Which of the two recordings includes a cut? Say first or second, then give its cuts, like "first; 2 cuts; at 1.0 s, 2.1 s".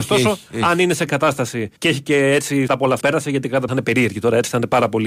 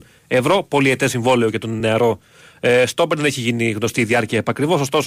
first; 5 cuts; at 1.1 s, 1.8 s, 2.7 s, 3.0 s, 3.7 s